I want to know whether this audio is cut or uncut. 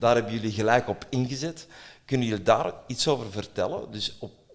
uncut